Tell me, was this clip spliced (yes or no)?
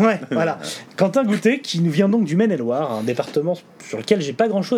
no